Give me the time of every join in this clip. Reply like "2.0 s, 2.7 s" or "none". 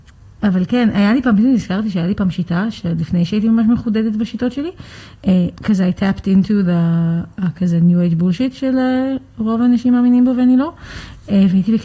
5.5 s